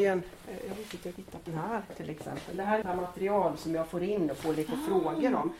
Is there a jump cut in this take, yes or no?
yes